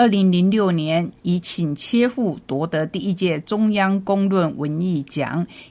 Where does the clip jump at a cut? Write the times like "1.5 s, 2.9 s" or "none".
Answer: 1.2 s

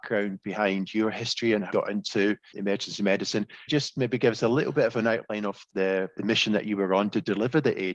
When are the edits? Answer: 1.7 s, 2.5 s, 3.7 s, 6.1 s

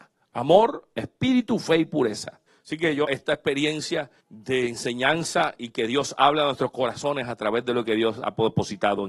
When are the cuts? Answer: 2.5 s, 3.0 s, 4.2 s

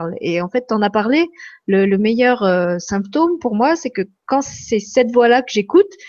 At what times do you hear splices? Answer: none

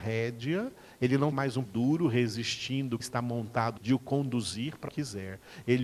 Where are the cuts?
1.3 s, 1.6 s, 3.0 s, 3.8 s, 4.9 s

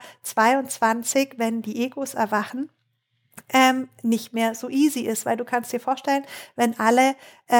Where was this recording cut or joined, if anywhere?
none

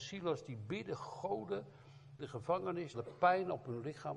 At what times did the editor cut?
2.2 s, 2.9 s

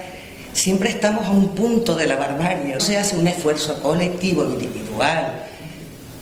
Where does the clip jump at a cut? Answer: 2.8 s

